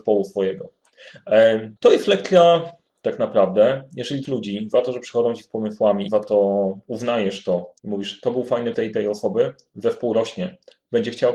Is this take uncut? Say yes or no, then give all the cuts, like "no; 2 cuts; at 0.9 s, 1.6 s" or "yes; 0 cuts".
no; 7 cuts; at 1.8 s, 2.9 s, 4.2 s, 6.1 s, 6.8 s, 7.8 s, 8.7 s